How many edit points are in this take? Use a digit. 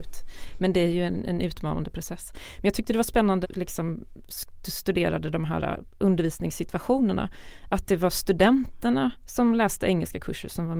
1